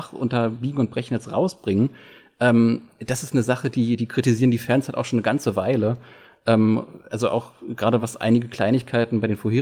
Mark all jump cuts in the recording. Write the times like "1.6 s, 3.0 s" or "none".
none